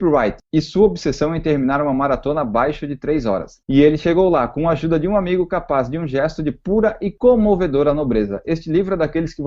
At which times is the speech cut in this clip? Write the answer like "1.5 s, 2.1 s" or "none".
3.6 s